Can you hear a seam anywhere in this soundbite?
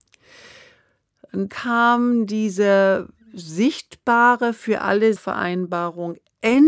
yes; 2 cuts; at 1.5 s, 5.2 s

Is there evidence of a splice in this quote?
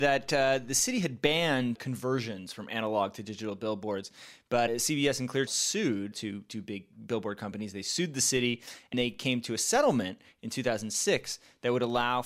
yes; 5 cuts; at 1.8 s, 4.7 s, 5.5 s, 6.1 s, 8.9 s

